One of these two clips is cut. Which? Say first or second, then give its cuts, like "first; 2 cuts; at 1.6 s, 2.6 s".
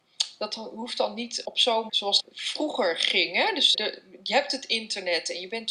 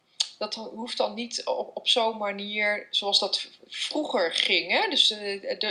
first; 4 cuts; at 1.4 s, 1.9 s, 2.2 s, 3.7 s